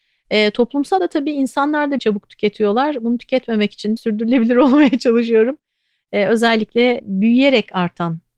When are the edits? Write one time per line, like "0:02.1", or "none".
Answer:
0:01.0
0:02.0
0:04.0